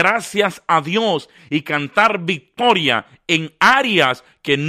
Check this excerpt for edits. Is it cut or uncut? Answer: uncut